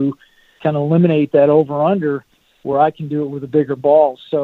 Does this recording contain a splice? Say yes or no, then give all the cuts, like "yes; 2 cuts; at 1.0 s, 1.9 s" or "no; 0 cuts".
no; 0 cuts